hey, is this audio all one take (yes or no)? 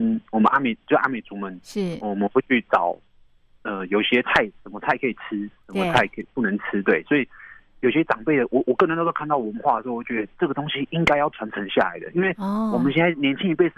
yes